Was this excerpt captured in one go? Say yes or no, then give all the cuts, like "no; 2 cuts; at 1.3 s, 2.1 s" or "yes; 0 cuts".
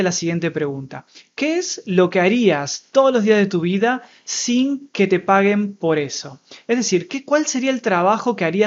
yes; 0 cuts